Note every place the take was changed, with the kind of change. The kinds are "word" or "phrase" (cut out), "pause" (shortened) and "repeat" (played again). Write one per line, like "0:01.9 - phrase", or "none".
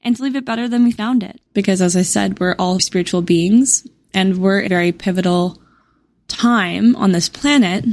0:01.5 - pause
0:02.8 - word
0:04.7 - word